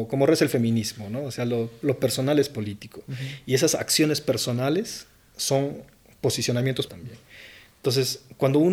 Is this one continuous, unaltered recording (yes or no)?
no